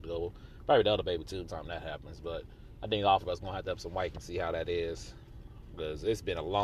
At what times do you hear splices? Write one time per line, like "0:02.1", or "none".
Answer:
0:01.4
0:03.2
0:03.7
0:04.1